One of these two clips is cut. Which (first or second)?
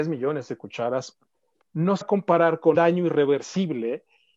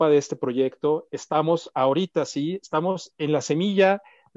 first